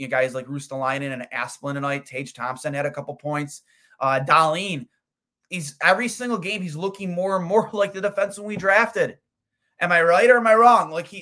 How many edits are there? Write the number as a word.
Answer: zero